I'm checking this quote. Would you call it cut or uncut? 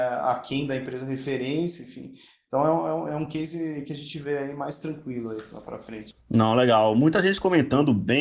uncut